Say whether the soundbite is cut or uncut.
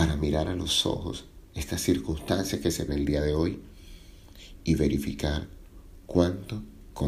cut